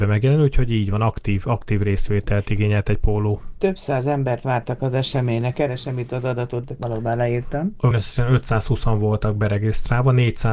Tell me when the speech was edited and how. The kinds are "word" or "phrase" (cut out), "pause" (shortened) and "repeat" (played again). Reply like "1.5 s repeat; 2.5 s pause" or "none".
7.9 s word